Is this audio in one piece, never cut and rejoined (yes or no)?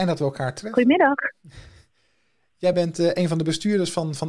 yes